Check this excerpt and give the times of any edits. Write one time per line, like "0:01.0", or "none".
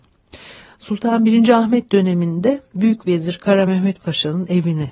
none